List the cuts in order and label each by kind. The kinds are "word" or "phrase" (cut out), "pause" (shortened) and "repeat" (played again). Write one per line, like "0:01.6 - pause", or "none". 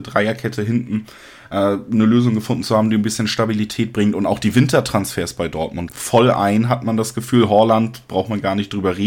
0:05.9 - word